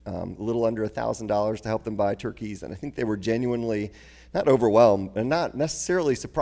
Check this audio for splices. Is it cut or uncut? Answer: uncut